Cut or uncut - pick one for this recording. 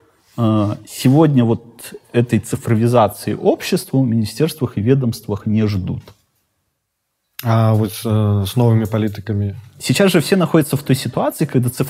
uncut